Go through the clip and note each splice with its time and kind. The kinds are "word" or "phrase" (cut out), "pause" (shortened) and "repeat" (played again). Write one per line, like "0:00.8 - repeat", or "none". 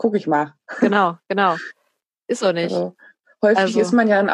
none